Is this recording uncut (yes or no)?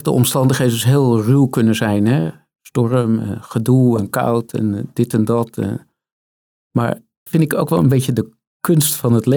no